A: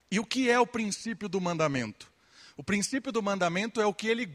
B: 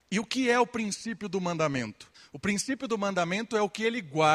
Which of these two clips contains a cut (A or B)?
B